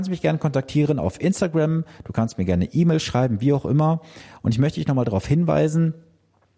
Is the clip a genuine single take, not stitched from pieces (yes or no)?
yes